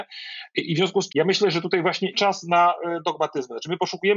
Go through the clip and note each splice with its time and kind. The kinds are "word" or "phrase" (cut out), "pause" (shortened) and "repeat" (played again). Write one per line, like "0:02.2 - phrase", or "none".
0:01.1 - word
0:02.1 - word